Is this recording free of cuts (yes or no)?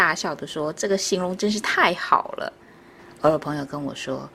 no